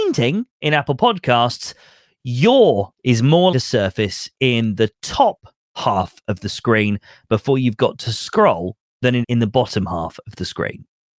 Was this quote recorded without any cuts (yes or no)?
no